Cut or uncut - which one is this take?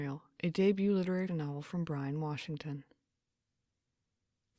cut